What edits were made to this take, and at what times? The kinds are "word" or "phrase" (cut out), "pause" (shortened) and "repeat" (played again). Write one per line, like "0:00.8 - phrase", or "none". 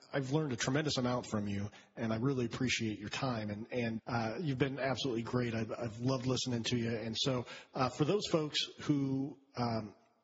0:04.0 - word